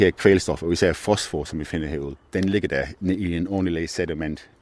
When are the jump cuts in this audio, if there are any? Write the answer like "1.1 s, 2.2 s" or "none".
2.3 s